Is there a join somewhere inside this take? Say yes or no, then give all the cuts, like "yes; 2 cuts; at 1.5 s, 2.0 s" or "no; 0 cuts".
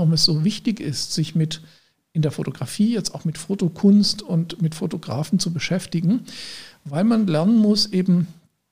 no; 0 cuts